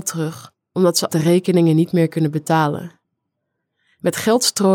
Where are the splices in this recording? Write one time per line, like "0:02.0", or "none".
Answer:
0:01.1